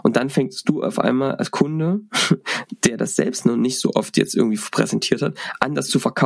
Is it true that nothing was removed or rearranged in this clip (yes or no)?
yes